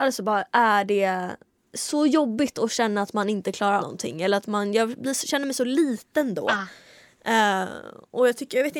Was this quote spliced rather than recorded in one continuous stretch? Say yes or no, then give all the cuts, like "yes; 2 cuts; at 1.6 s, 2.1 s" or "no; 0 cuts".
yes; 1 cut; at 3.8 s